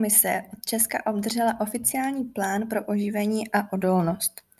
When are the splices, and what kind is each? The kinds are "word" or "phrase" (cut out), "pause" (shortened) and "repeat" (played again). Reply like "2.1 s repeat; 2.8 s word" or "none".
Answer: none